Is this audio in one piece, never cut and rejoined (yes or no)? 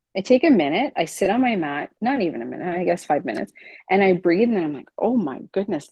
no